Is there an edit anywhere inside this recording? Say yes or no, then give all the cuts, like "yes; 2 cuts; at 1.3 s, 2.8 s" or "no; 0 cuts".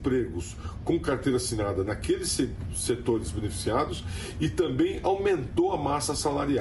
no; 0 cuts